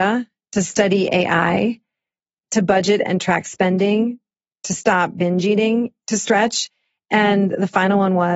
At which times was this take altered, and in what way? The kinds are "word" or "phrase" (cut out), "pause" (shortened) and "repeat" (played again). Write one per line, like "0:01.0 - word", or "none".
none